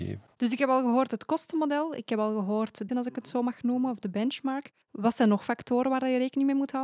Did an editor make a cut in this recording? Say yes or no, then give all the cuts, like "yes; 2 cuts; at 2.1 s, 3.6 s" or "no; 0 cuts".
yes; 2 cuts; at 2.9 s, 4.8 s